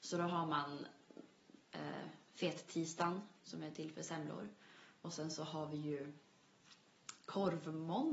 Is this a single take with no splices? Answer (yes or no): yes